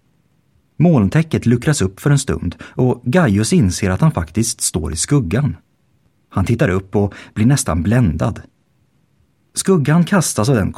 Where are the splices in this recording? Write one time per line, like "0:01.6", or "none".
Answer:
none